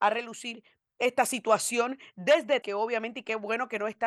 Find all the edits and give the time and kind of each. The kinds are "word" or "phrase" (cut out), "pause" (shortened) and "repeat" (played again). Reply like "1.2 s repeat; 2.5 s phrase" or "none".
2.6 s word